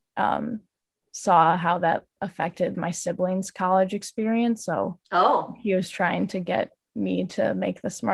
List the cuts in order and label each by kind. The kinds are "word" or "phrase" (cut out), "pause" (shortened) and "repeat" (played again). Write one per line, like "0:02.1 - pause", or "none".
0:02.7 - word
0:05.0 - pause

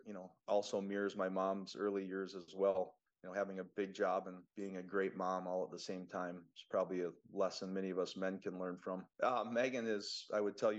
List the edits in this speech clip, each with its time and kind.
0:03.1 - pause
0:04.5 - pause
0:09.1 - pause

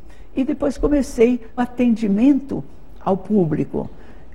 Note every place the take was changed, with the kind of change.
0:01.6 - word

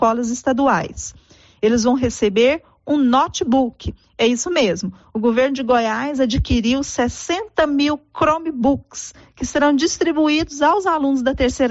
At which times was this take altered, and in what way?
none

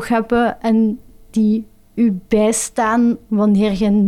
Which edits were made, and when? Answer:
none

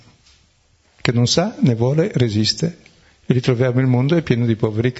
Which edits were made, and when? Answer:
0:03.0 - pause

